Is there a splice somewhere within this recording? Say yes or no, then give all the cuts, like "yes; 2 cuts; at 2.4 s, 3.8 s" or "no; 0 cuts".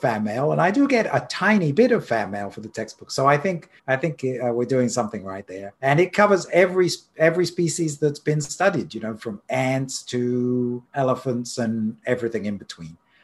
yes; 3 cuts; at 3.8 s, 5.8 s, 10.9 s